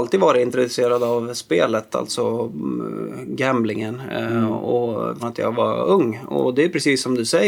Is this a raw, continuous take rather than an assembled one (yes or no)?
no